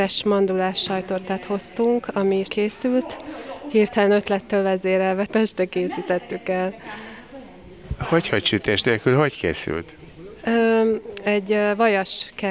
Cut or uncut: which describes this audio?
cut